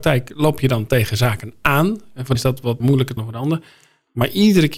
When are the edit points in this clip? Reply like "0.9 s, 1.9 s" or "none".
2.3 s, 2.8 s, 3.2 s